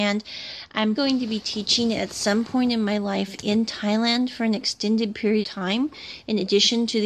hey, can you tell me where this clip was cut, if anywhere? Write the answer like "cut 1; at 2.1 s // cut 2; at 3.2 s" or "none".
cut 1; at 1.0 s // cut 2; at 5.4 s

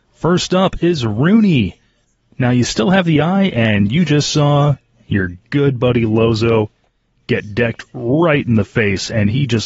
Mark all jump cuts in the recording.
none

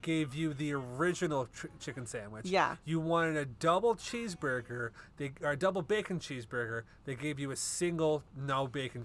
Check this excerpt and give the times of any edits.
none

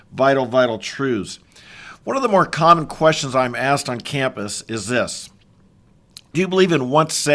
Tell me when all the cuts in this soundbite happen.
cut 1; at 6.3 s

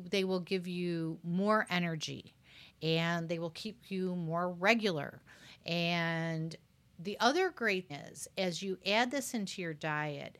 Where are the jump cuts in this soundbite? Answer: cut 1; at 7.9 s

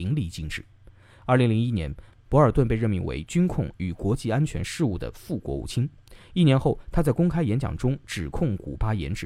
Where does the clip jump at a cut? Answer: none

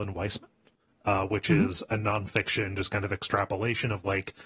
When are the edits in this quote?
none

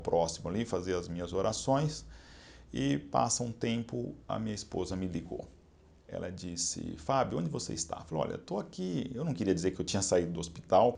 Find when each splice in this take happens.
cut 1; at 9.7 s

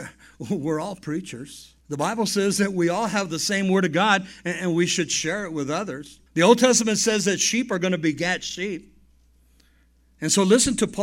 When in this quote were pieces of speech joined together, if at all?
cut 1; at 1.8 s // cut 2; at 6.3 s

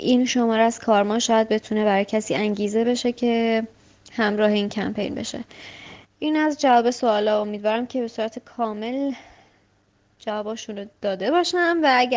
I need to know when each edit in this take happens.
none

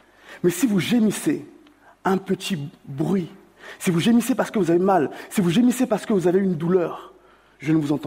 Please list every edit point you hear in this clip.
none

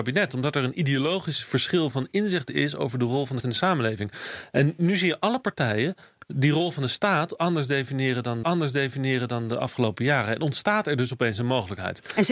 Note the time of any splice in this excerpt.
cut 1; at 3.4 s // cut 2; at 8.4 s

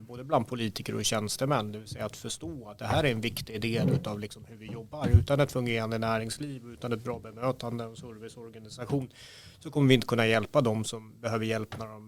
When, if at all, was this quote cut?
none

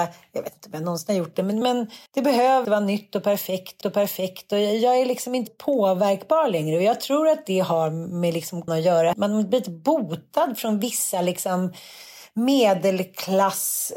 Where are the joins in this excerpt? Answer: cut 1; at 1.6 s // cut 2; at 2.1 s // cut 3; at 2.6 s // cut 4; at 3.8 s // cut 5; at 5.5 s // cut 6; at 8.7 s // cut 7; at 9.1 s

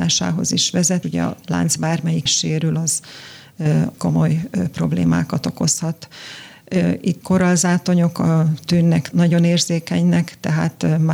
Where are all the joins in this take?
cut 1; at 1.0 s // cut 2; at 1.4 s // cut 3; at 2.3 s // cut 4; at 3.9 s // cut 5; at 7.2 s // cut 6; at 9.1 s

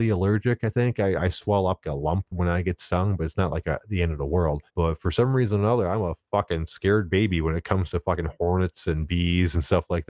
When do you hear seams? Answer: cut 1; at 1.8 s // cut 2; at 2.3 s // cut 3; at 4.7 s

